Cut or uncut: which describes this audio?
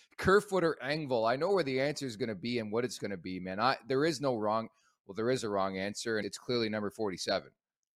cut